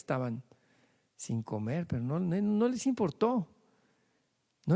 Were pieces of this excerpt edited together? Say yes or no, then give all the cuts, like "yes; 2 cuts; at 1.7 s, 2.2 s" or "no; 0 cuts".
no; 0 cuts